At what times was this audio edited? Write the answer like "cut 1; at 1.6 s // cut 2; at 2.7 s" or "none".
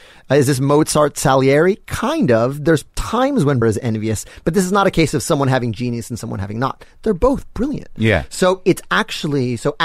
cut 1; at 3.6 s